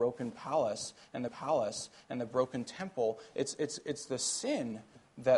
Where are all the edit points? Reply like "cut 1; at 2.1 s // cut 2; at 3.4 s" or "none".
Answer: cut 1; at 1.3 s